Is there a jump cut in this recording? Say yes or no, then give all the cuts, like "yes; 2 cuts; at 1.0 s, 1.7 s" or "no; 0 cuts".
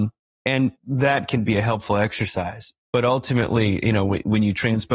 no; 0 cuts